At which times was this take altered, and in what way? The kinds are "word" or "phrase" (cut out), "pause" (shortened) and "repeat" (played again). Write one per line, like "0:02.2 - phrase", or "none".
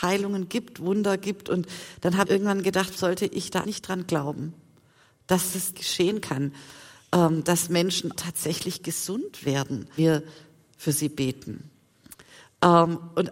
0:02.2 - word
0:03.0 - word
0:03.6 - word
0:05.7 - word
0:08.1 - word
0:10.0 - word